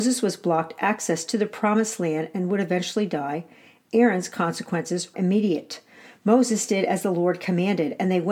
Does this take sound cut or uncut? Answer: cut